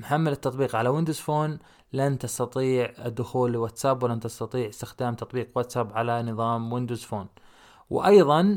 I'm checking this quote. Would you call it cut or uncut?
uncut